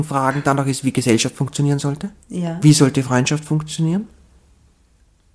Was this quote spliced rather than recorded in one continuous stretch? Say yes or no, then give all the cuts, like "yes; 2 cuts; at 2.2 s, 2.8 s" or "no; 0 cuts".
yes; 1 cut; at 2.2 s